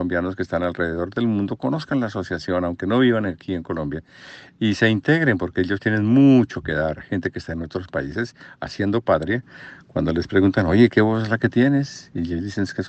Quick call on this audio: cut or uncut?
cut